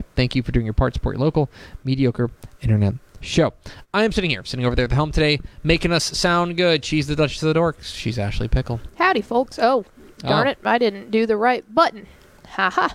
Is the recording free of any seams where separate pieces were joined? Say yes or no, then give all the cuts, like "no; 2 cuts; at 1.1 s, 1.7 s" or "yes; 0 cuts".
yes; 0 cuts